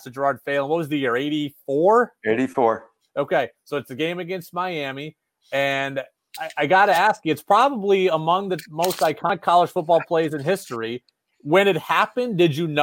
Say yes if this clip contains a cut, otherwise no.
no